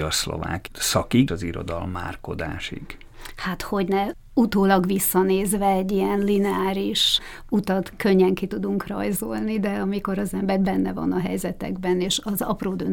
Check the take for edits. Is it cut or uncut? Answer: cut